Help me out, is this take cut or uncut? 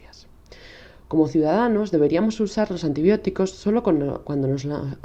uncut